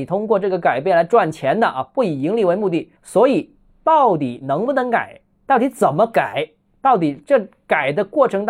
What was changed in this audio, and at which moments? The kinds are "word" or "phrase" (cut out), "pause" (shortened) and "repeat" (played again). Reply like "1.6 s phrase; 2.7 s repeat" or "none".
3.0 s pause